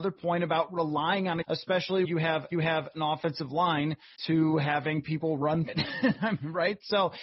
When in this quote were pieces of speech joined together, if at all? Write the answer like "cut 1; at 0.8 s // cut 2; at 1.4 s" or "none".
cut 1; at 1.4 s // cut 2; at 2.0 s // cut 3; at 2.5 s // cut 4; at 4.2 s // cut 5; at 5.7 s

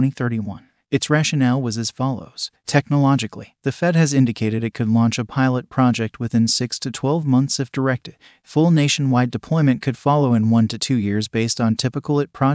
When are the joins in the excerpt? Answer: none

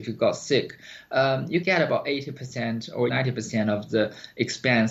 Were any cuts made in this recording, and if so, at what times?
cut 1; at 1.6 s // cut 2; at 3.1 s

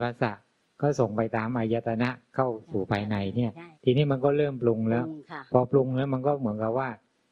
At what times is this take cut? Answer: cut 1; at 3.7 s

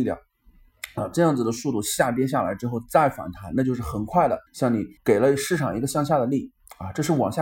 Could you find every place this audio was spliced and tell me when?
cut 1; at 4.5 s // cut 2; at 5.0 s

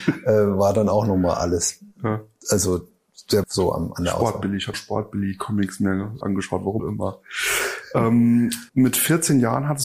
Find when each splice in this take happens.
cut 1; at 3.4 s // cut 2; at 4.7 s // cut 3; at 6.2 s // cut 4; at 6.8 s // cut 5; at 8.7 s

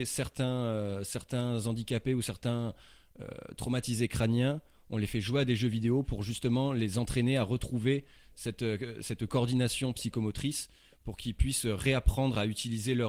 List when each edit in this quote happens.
none

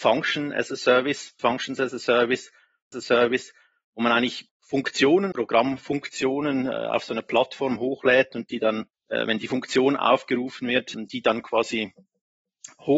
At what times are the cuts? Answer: cut 1; at 1.4 s // cut 2; at 2.9 s // cut 3; at 4.5 s // cut 4; at 5.3 s // cut 5; at 8.9 s // cut 6; at 10.9 s

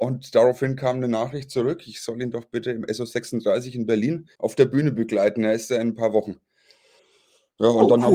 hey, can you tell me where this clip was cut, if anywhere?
cut 1; at 4.3 s

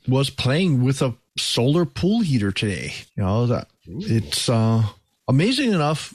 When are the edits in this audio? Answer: cut 1; at 1.3 s // cut 2; at 3.1 s

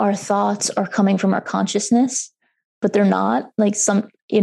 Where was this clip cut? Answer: none

